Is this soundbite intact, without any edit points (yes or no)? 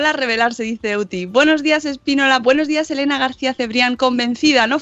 yes